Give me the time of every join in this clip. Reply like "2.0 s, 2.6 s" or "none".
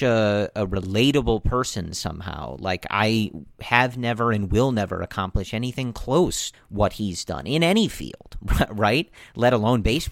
6.5 s

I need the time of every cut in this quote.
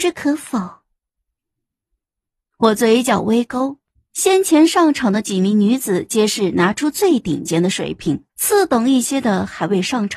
3.9 s, 8.3 s

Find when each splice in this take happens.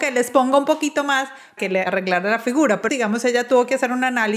1.6 s, 2.9 s

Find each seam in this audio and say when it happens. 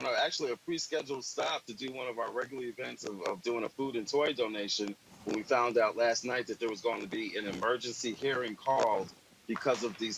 none

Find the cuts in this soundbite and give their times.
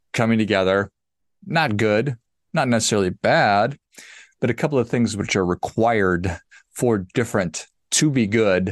none

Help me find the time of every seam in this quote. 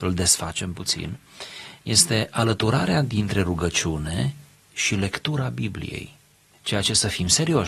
none

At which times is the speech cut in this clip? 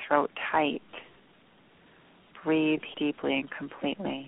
2.9 s

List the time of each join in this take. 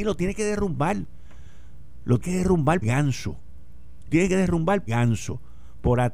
2.2 s, 2.8 s, 4.1 s, 4.9 s

